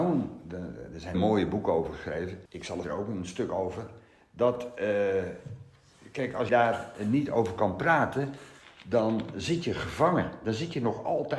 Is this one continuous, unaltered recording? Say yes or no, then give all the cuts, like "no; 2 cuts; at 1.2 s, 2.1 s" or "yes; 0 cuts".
no; 4 cuts; at 1.1 s, 2.5 s, 2.8 s, 6.5 s